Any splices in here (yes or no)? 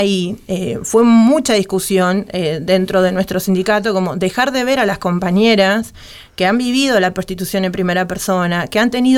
no